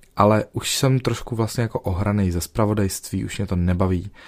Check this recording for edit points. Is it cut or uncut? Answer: uncut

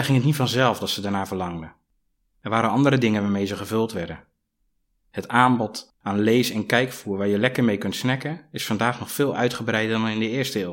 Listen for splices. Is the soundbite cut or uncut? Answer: uncut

